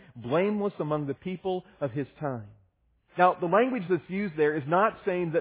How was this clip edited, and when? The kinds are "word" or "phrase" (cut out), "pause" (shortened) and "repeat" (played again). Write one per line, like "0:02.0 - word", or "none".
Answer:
none